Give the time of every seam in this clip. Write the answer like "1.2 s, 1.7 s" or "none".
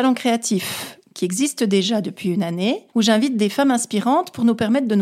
2.9 s